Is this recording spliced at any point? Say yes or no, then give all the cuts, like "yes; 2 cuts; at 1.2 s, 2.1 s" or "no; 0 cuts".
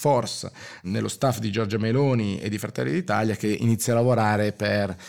no; 0 cuts